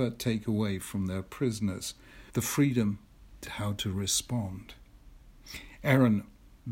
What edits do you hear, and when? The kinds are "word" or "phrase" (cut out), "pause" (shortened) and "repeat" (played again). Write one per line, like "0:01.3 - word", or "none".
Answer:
0:02.3 - pause
0:03.4 - word